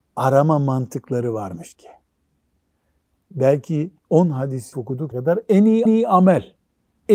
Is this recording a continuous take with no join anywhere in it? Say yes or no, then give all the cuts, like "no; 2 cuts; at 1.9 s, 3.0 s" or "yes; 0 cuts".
no; 5 cuts; at 1.7 s, 4.0 s, 4.7 s, 5.1 s, 5.9 s